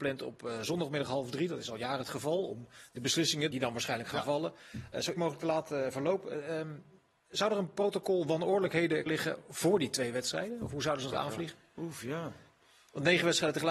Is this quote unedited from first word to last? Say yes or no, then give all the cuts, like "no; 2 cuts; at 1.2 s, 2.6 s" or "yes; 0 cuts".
no; 4 cuts; at 3.5 s, 5.1 s, 9.1 s, 11.1 s